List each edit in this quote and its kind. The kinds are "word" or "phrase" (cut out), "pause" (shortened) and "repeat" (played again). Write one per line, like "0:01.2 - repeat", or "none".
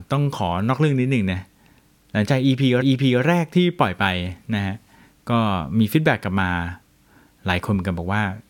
0:02.8 - repeat